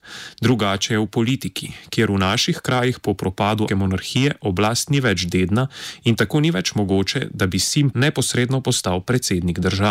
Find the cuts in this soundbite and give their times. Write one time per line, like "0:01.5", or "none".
0:03.7
0:07.9